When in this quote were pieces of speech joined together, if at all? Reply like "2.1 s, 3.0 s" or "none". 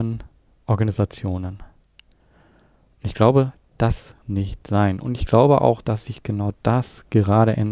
4.2 s

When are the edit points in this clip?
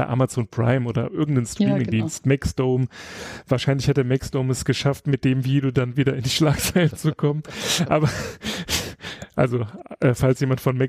none

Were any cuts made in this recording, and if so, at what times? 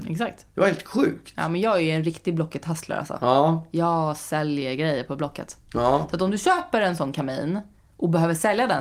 none

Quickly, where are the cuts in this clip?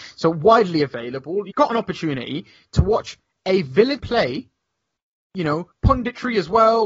1.5 s, 4.0 s, 5.7 s

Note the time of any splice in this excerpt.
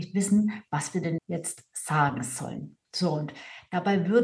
1.2 s, 2.8 s

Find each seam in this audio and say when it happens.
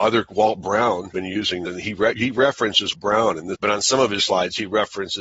1.1 s, 1.7 s, 2.1 s, 2.9 s, 3.5 s, 4.2 s

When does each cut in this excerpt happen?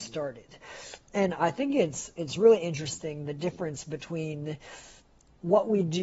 none

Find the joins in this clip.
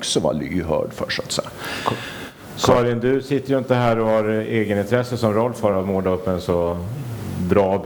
none

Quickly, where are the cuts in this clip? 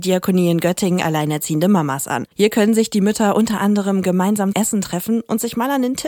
1.0 s, 2.3 s, 4.5 s

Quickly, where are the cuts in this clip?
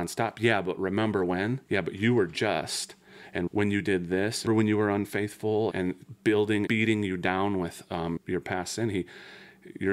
1.7 s, 3.5 s, 4.5 s, 5.7 s, 6.7 s, 8.2 s

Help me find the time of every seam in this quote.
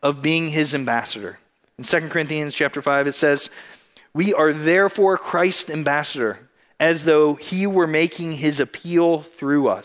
none

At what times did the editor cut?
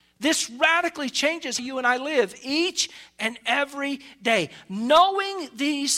1.6 s

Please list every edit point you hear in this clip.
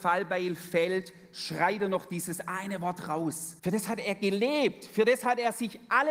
3.6 s

